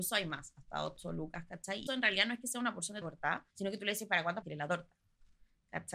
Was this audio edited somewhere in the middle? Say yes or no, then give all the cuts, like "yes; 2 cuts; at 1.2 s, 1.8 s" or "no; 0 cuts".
yes; 4 cuts; at 1.9 s, 3.0 s, 3.5 s, 4.4 s